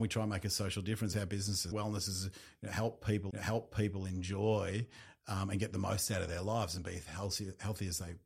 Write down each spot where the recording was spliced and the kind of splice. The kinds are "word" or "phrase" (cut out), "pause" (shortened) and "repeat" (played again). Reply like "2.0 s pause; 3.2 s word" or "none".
1.1 s phrase; 1.7 s word; 3.3 s repeat